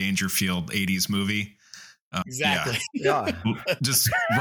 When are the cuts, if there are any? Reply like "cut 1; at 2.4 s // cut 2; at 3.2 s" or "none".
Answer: cut 1; at 2.2 s